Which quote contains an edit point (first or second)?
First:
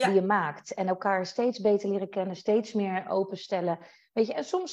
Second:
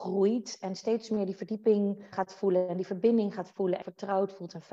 second